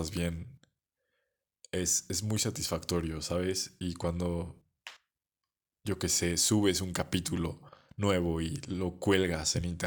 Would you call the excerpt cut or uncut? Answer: uncut